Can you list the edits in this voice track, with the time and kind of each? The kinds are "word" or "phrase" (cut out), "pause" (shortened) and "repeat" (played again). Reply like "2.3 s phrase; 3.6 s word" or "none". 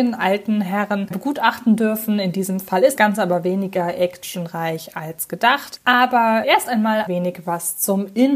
1.1 s word; 3.0 s word; 6.4 s word; 7.1 s word